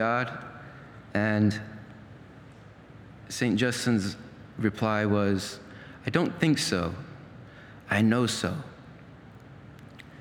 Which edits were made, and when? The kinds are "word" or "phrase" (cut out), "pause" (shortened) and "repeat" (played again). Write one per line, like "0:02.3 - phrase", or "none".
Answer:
none